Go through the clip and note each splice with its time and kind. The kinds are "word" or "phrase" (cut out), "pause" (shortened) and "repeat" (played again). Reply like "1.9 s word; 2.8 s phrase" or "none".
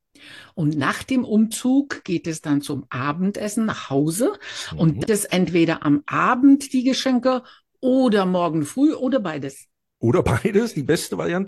5.1 s phrase